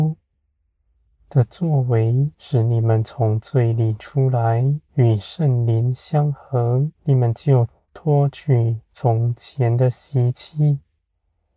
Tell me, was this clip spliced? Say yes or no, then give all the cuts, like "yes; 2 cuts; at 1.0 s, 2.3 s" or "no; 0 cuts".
yes; 3 cuts; at 2.3 s, 4.9 s, 6.9 s